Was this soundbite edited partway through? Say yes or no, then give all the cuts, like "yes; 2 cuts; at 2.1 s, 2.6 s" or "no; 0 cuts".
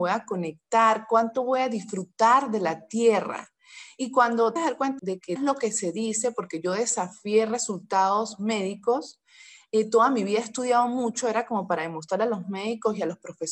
yes; 3 cuts; at 4.6 s, 5.0 s, 5.4 s